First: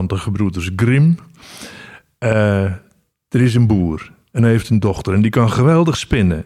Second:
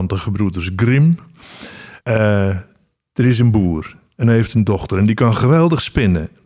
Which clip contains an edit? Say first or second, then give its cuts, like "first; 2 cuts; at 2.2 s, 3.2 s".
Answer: second; 1 cut; at 2.0 s